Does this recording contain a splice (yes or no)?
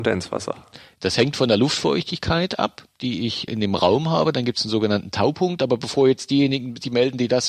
yes